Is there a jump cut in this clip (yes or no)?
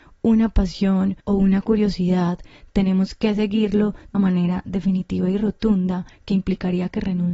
yes